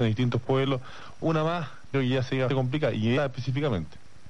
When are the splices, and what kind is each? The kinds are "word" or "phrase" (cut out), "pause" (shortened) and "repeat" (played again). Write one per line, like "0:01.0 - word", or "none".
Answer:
0:01.2 - word
0:01.9 - word
0:02.5 - word
0:03.2 - word